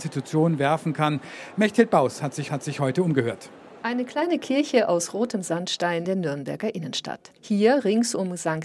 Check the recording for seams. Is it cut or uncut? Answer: cut